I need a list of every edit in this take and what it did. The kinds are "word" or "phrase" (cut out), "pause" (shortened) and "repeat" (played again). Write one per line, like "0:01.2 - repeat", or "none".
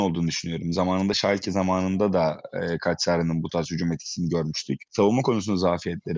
none